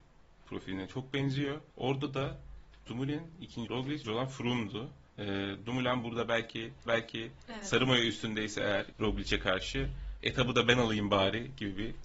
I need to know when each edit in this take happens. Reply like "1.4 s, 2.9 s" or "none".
1.7 s, 2.9 s, 3.7 s, 4.0 s, 5.1 s, 6.9 s, 8.9 s, 10.2 s